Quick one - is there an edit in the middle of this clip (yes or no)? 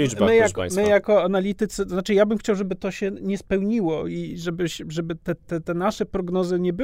yes